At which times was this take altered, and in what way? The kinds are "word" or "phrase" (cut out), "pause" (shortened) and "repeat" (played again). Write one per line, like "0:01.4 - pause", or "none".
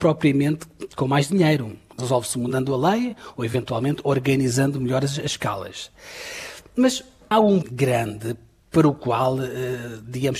0:01.9 - word
0:07.3 - word
0:07.6 - word